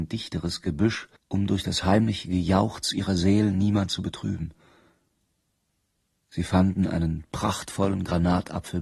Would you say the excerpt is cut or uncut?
cut